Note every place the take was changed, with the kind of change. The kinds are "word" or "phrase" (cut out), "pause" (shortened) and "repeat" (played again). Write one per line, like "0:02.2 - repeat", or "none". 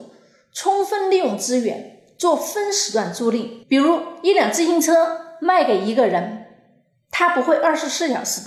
0:03.6 - pause